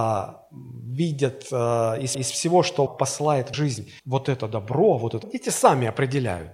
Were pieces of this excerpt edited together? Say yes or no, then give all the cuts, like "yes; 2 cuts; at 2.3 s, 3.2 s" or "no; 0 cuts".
yes; 5 cuts; at 2.1 s, 2.9 s, 3.5 s, 4.0 s, 5.2 s